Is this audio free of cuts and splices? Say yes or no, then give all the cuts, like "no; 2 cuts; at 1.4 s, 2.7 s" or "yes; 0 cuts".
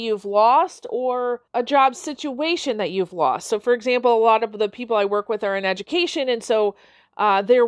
no; 1 cut; at 1.5 s